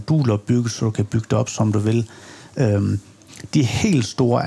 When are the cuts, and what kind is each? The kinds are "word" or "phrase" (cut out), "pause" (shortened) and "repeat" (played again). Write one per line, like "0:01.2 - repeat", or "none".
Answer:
none